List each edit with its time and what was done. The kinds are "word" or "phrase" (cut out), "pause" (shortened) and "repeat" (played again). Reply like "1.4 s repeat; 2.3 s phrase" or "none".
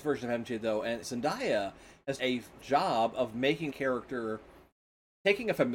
1.0 s word; 2.2 s word; 2.6 s word; 3.7 s word